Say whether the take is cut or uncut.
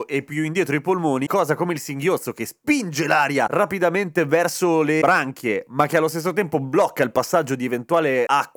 cut